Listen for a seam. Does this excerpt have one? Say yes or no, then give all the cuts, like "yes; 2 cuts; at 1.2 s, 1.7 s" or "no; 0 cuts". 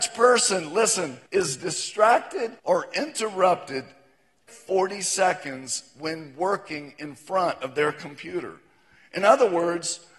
yes; 3 cuts; at 1.3 s, 2.6 s, 4.5 s